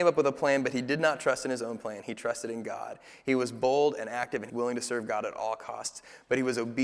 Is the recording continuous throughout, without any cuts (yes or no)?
no